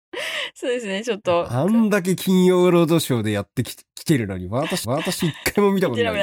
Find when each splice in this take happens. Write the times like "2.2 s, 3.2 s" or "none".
4.8 s